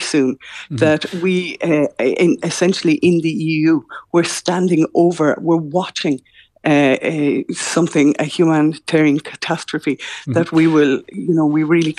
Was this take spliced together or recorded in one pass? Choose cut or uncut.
uncut